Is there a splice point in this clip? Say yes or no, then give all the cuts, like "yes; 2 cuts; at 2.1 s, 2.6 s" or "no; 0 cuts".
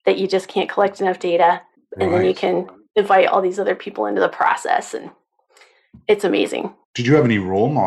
no; 0 cuts